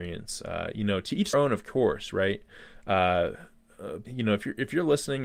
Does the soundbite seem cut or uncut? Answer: cut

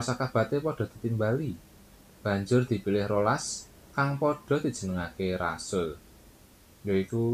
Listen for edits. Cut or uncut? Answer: uncut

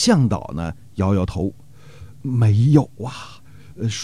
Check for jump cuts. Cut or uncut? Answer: uncut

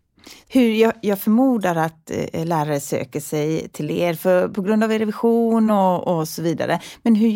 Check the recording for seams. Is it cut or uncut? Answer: uncut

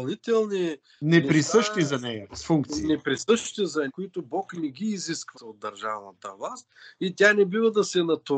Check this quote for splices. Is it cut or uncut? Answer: cut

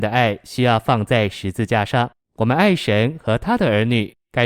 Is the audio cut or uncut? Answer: cut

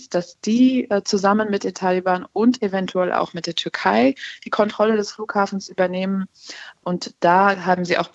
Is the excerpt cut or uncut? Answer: uncut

